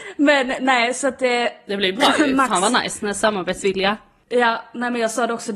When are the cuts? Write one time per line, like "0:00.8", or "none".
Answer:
none